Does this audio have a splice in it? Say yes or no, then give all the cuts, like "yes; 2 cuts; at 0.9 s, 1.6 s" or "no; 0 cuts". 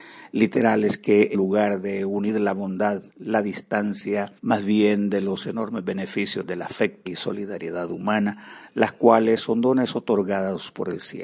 yes; 4 cuts; at 1.3 s, 3.1 s, 4.4 s, 7.1 s